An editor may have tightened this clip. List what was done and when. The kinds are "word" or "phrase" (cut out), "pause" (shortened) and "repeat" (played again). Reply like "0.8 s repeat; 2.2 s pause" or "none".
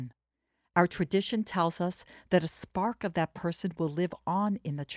none